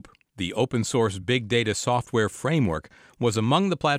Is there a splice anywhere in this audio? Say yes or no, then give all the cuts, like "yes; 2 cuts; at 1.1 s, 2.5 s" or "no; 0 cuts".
no; 0 cuts